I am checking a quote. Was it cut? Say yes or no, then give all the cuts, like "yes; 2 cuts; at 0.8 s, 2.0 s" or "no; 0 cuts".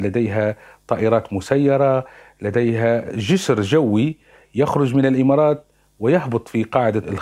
no; 0 cuts